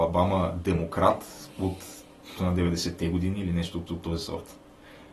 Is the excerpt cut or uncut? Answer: cut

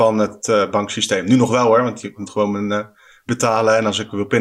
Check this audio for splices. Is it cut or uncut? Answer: cut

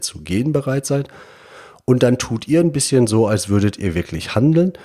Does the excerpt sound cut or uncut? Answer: uncut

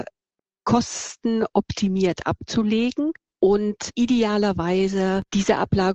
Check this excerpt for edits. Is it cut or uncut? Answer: cut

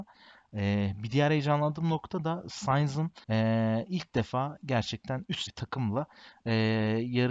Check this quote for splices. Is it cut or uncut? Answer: cut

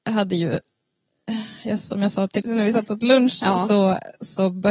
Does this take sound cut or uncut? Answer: cut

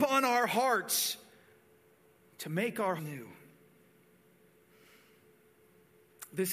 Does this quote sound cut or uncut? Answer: cut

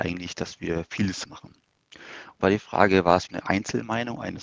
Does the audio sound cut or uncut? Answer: cut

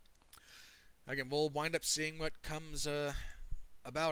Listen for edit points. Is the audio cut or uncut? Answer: uncut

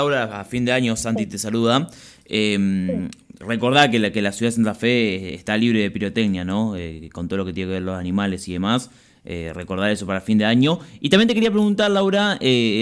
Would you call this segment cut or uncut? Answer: uncut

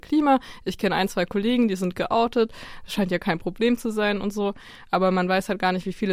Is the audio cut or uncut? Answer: uncut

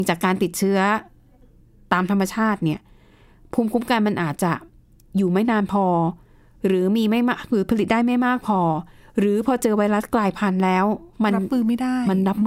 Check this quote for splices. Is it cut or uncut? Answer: cut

